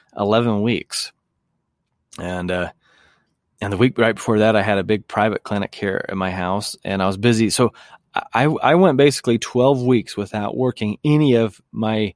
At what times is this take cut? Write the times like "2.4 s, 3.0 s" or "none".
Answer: none